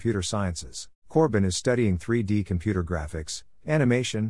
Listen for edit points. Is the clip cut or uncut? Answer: cut